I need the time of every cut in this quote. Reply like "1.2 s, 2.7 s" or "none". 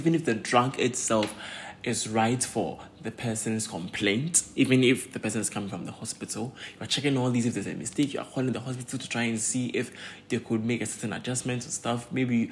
none